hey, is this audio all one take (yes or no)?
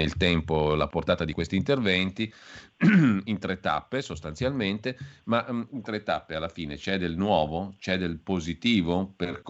no